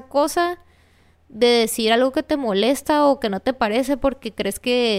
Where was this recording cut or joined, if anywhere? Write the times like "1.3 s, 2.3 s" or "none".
none